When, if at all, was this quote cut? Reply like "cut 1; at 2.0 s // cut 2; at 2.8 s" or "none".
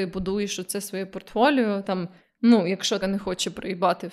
cut 1; at 1.8 s // cut 2; at 2.2 s // cut 3; at 3.0 s